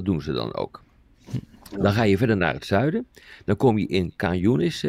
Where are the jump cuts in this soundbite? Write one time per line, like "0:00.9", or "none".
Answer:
none